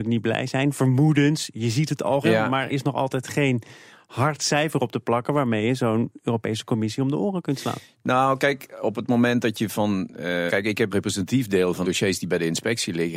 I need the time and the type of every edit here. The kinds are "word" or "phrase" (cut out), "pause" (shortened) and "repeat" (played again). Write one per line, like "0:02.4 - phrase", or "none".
0:02.2 - word
0:02.7 - word
0:10.5 - word
0:10.9 - word
0:11.8 - word